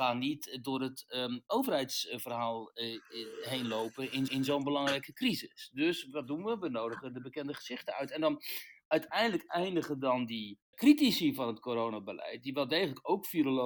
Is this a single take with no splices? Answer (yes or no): no